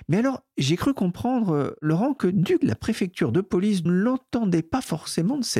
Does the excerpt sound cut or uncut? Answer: cut